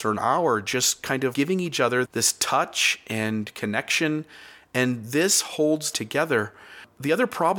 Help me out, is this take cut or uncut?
cut